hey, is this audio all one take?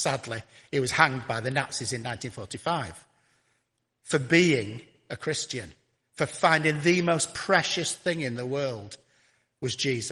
yes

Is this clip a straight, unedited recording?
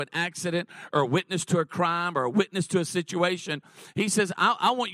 yes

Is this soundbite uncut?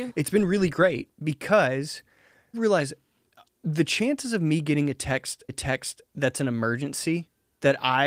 no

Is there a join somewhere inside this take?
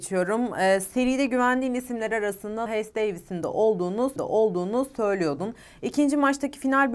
yes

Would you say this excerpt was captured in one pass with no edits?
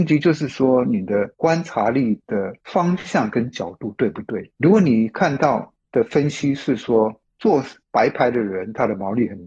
no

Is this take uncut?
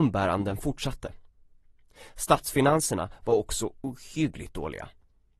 yes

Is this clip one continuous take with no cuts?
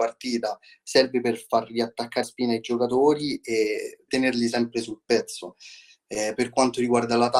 no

